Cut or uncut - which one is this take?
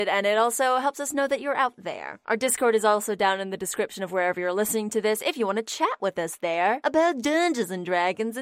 uncut